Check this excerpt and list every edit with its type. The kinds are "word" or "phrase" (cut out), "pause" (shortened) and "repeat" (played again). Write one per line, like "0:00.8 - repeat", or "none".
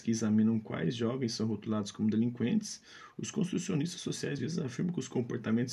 0:04.4 - word